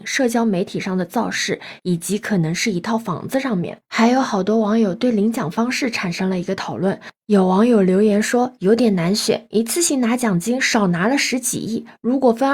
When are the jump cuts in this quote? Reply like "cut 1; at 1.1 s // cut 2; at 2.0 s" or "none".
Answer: cut 1; at 3.8 s